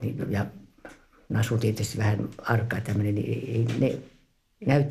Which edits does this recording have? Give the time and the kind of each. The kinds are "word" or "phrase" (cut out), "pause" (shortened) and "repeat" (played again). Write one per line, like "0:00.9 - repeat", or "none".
none